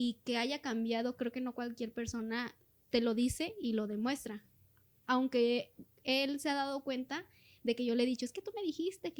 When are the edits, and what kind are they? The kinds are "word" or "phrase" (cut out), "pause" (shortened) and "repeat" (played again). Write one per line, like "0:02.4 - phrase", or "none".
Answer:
none